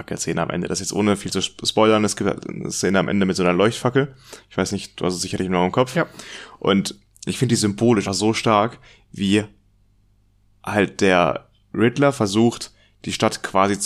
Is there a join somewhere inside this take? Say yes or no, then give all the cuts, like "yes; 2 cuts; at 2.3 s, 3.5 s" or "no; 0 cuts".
yes; 1 cut; at 8.1 s